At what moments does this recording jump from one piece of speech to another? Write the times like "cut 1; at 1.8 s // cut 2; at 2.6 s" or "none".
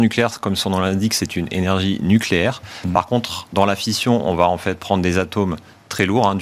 none